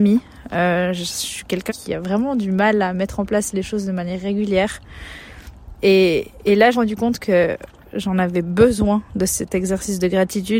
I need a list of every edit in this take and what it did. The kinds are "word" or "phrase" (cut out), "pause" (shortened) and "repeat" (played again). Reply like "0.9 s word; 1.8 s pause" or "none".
1.7 s word; 6.7 s phrase

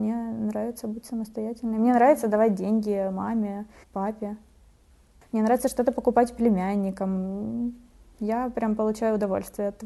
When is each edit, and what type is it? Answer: 3.8 s pause

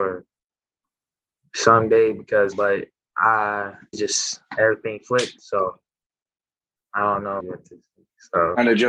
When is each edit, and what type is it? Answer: 2.5 s word; 3.9 s word; 7.4 s word

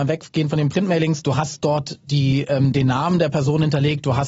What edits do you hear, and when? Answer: none

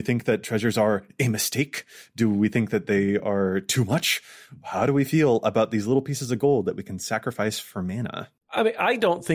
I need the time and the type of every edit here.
none

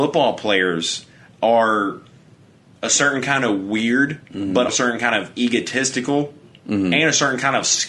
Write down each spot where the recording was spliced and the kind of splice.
4.7 s word

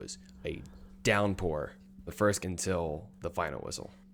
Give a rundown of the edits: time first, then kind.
2.1 s word; 2.4 s word

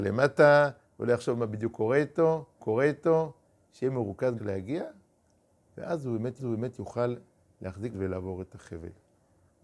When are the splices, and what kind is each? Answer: 2.6 s repeat; 4.4 s phrase; 6.4 s repeat; 7.9 s word

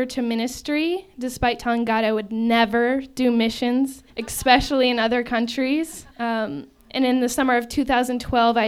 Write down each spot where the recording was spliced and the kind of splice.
4.1 s pause; 6.1 s pause

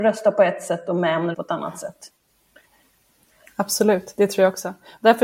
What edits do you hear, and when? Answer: 1.3 s word

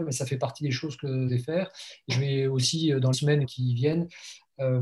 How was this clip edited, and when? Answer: 1.3 s word; 2.1 s word; 3.1 s word; 3.4 s word

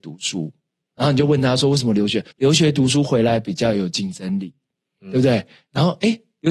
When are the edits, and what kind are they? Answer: 2.3 s pause

